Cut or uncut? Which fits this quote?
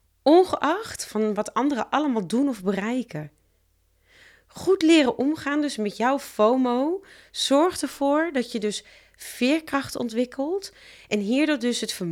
uncut